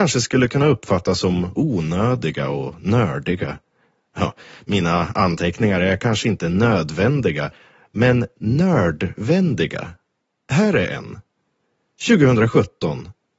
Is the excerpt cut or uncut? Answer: uncut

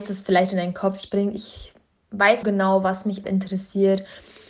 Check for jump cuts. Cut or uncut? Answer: cut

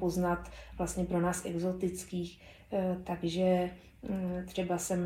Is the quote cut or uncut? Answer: uncut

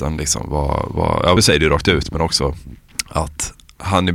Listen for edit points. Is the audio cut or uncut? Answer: cut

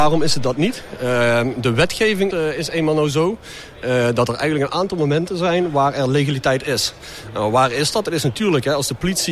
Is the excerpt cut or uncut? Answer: cut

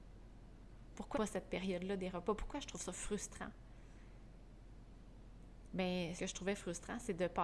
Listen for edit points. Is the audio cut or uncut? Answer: cut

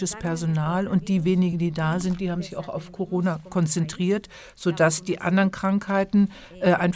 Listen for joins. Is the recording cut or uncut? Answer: uncut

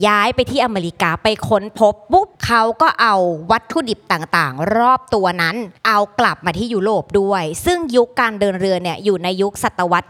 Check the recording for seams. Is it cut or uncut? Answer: cut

